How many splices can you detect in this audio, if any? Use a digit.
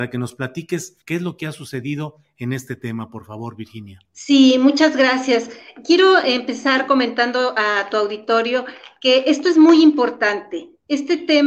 2